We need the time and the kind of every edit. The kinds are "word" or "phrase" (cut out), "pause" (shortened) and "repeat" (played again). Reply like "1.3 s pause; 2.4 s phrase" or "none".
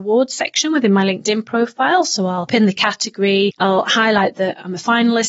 2.5 s word